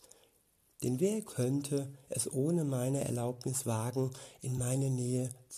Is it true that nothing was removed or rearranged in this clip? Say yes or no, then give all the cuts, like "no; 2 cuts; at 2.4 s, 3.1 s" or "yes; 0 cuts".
yes; 0 cuts